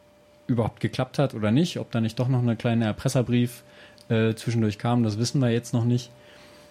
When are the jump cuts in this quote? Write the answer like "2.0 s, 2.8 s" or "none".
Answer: none